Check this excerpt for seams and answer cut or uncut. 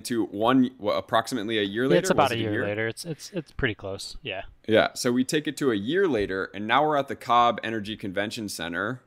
uncut